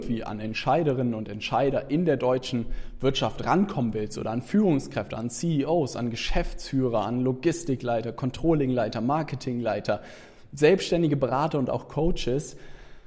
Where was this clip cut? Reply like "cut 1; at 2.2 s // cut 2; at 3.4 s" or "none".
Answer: none